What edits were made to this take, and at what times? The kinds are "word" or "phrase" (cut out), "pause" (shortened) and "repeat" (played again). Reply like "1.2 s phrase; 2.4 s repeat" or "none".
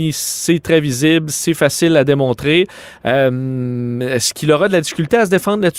none